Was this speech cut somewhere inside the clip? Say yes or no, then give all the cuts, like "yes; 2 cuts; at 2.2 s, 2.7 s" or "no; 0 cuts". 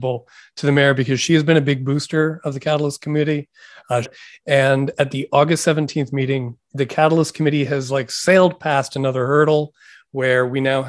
yes; 1 cut; at 4.0 s